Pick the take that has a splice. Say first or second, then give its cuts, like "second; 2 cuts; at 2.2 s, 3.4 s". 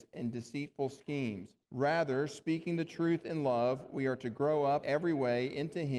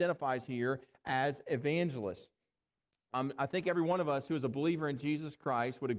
first; 2 cuts; at 1.6 s, 4.8 s